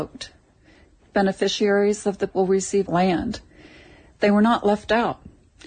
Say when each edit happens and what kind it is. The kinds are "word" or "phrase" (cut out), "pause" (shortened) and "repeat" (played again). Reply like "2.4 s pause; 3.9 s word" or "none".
2.3 s word; 2.9 s phrase